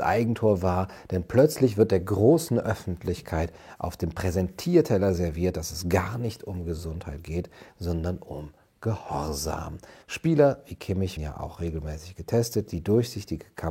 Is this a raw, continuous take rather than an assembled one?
no; 2 cuts; at 10.0 s, 11.2 s

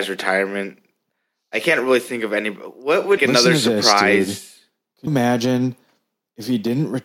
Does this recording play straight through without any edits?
no; 2 cuts; at 3.2 s, 5.1 s

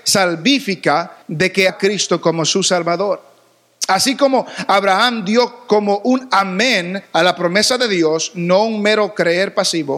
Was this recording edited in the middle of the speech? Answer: yes; 3 cuts; at 1.2 s, 1.7 s, 7.0 s

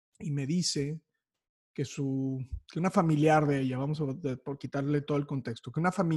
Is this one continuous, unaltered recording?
yes; 0 cuts

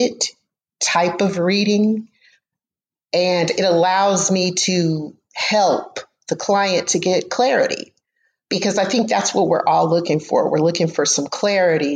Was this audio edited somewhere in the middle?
no; 0 cuts

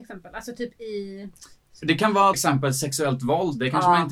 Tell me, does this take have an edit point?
yes; 1 cut; at 2.3 s

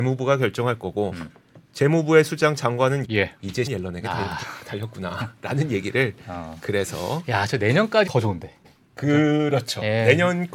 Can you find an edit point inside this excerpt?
yes; 4 cuts; at 3.0 s, 3.7 s, 8.1 s, 8.6 s

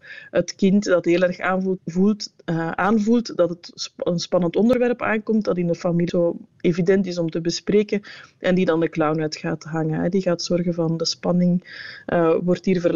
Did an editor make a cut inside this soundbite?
yes; 2 cuts; at 1.8 s, 6.1 s

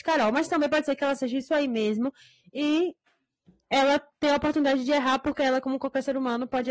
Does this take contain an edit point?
no; 0 cuts

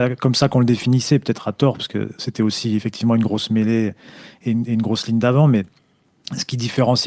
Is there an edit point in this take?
no; 0 cuts

